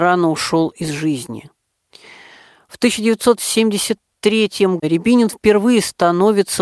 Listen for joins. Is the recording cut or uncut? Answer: cut